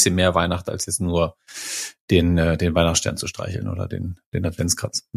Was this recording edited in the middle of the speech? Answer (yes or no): no